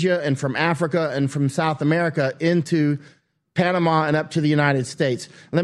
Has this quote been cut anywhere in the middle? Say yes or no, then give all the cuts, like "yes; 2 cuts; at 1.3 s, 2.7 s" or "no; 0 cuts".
no; 0 cuts